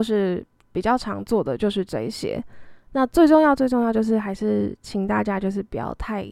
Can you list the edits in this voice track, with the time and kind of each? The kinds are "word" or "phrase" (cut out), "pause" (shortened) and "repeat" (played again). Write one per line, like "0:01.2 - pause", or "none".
0:02.8 - pause